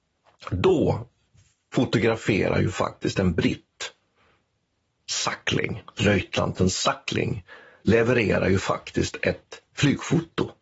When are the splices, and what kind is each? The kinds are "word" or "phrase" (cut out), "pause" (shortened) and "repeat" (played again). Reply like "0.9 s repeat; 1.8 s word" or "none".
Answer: none